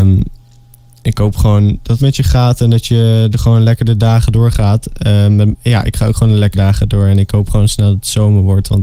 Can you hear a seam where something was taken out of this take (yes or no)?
yes